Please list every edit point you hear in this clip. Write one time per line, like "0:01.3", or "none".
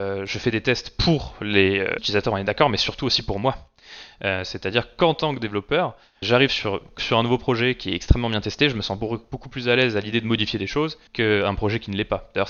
0:02.0
0:06.2
0:07.0
0:11.1